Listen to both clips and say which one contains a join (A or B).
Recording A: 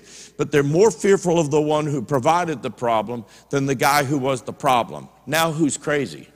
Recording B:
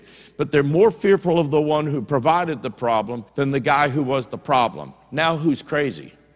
B